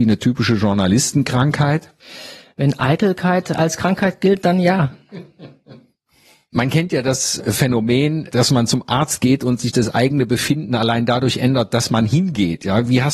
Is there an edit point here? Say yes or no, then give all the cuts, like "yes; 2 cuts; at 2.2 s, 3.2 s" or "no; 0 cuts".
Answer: no; 0 cuts